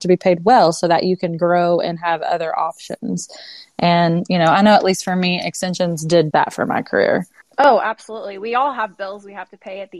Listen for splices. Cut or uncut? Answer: cut